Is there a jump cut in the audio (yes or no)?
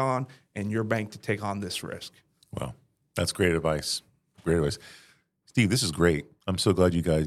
no